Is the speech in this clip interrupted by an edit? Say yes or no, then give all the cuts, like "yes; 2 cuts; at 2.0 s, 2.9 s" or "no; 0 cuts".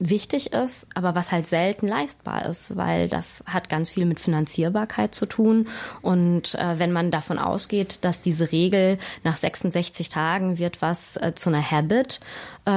no; 0 cuts